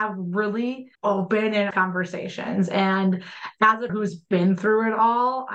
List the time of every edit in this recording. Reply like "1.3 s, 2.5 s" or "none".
1.0 s, 1.7 s, 3.9 s